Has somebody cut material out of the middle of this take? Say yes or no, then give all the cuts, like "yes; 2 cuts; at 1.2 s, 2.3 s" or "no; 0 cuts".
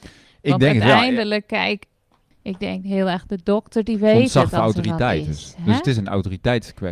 no; 0 cuts